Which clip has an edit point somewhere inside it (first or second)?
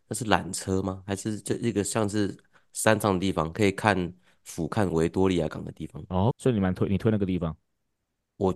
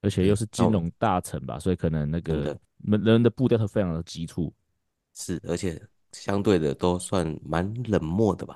first